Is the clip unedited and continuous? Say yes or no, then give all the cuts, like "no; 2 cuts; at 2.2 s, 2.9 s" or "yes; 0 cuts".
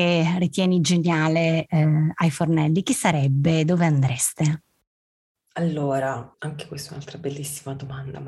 no; 1 cut; at 6.3 s